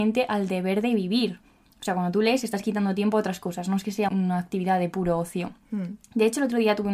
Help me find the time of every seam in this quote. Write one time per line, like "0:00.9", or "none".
0:04.1